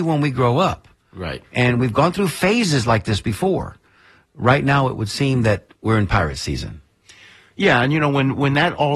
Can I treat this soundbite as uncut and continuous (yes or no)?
yes